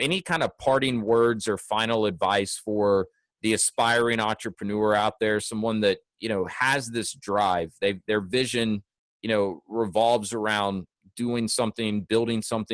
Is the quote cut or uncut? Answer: uncut